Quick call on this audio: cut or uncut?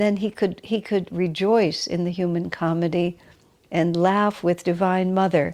uncut